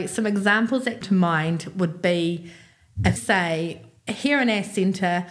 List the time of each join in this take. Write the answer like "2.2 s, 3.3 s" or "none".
1.0 s, 3.2 s